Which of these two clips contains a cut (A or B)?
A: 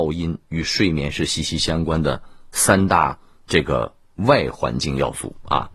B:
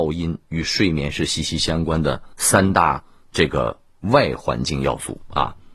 B